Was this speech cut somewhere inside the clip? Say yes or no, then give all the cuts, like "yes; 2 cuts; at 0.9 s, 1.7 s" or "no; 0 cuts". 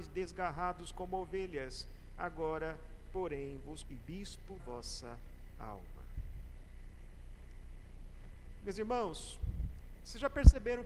yes; 2 cuts; at 3.8 s, 4.6 s